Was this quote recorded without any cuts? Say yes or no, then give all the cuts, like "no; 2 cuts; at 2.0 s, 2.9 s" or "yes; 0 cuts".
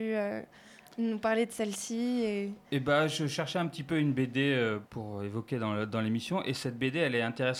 no; 1 cut; at 4.9 s